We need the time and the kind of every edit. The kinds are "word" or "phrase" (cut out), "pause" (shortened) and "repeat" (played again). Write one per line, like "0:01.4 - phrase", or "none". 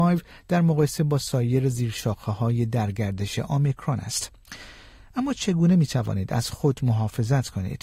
none